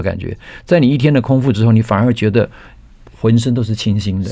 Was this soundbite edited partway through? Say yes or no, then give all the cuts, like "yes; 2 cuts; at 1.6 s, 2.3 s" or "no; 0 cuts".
no; 0 cuts